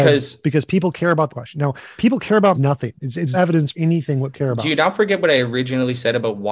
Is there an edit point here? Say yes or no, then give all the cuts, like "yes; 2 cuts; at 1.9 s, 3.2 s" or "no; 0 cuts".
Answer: yes; 6 cuts; at 1.3 s, 2.0 s, 2.5 s, 3.3 s, 3.7 s, 4.3 s